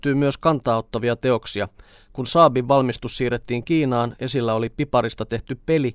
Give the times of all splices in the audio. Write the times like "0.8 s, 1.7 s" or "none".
none